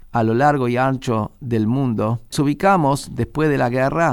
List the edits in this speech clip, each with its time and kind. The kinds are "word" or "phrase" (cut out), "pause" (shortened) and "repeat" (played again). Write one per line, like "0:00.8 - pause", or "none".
0:02.3 - phrase